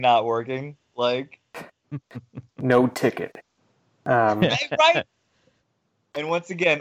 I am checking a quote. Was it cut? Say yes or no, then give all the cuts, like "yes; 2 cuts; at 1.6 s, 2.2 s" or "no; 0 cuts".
no; 0 cuts